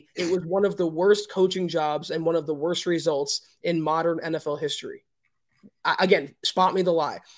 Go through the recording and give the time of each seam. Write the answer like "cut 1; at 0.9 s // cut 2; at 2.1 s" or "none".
none